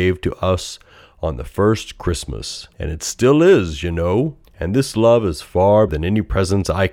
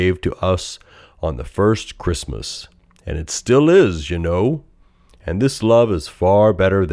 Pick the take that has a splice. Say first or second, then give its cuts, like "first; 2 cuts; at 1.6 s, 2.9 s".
first; 3 cuts; at 2.7 s, 4.4 s, 5.9 s